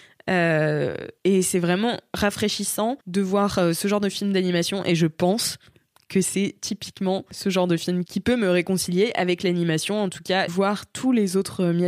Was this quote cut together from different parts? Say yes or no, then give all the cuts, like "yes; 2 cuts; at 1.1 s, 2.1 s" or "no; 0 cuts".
yes; 3 cuts; at 1.2 s, 3.0 s, 10.5 s